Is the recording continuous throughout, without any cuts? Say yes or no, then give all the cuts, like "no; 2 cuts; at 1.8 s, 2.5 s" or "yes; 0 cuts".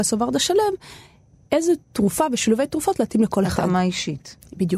yes; 0 cuts